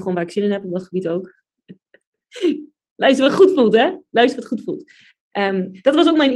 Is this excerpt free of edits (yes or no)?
yes